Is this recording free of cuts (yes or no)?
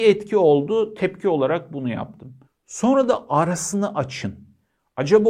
no